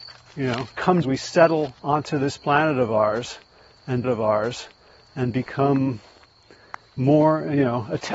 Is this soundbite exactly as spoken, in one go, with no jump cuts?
no; 3 cuts; at 1.0 s, 1.8 s, 4.0 s

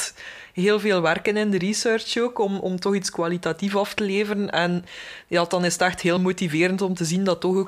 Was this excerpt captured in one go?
yes; 0 cuts

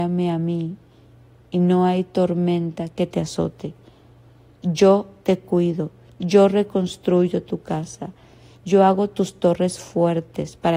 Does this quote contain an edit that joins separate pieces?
no; 0 cuts

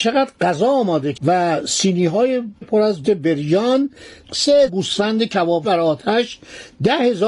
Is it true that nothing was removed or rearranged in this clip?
no; 5 cuts; at 1.1 s, 2.6 s, 3.0 s, 4.7 s, 5.6 s

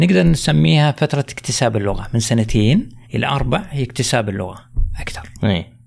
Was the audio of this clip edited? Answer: yes; 1 cut; at 3.0 s

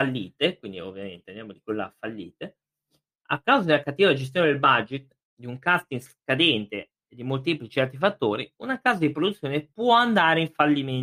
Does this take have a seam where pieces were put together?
no; 0 cuts

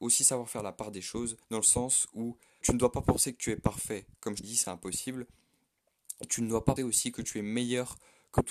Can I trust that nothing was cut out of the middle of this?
no; 4 cuts; at 1.4 s, 2.6 s, 4.4 s, 6.8 s

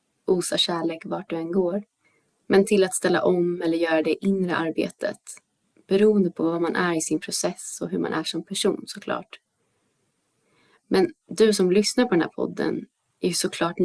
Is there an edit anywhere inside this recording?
no; 0 cuts

